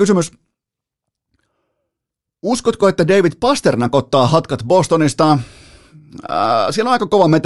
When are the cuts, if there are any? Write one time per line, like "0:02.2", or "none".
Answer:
none